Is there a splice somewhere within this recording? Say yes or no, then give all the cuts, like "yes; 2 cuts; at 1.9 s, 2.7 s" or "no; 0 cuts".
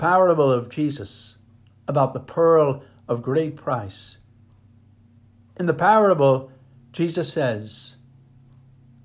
no; 0 cuts